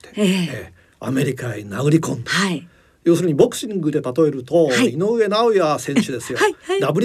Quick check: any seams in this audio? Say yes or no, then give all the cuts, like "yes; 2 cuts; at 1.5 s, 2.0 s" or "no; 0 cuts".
no; 0 cuts